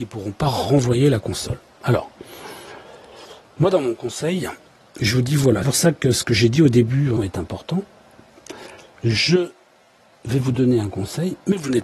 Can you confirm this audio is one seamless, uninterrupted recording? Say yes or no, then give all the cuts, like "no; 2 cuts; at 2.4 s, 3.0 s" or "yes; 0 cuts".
no; 2 cuts; at 5.6 s, 7.2 s